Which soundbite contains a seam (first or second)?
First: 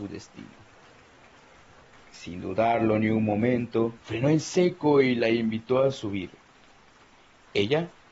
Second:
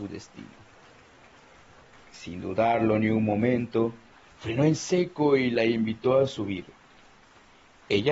first